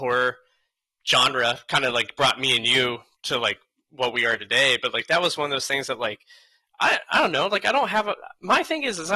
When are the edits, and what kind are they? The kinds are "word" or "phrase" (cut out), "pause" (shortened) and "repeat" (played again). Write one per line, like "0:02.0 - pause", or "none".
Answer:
none